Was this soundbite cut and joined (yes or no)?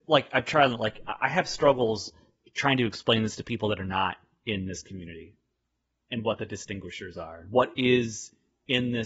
no